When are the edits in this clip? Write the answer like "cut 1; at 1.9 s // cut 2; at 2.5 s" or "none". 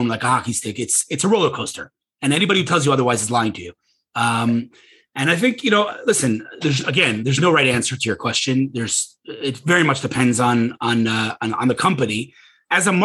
none